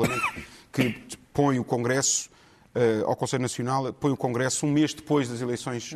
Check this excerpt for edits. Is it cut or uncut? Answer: uncut